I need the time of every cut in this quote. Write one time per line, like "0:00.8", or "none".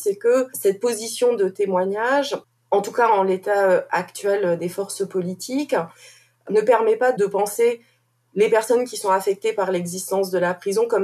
0:02.4